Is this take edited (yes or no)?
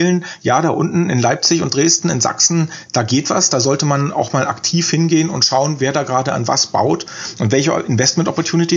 no